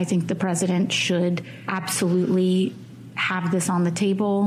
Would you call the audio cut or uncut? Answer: uncut